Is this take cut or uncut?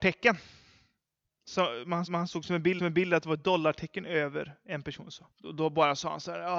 cut